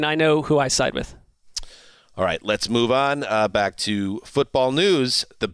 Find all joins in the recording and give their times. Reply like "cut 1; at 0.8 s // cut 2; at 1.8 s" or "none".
none